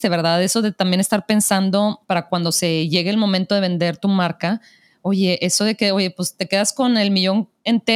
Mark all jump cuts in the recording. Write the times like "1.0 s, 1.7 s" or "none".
2.0 s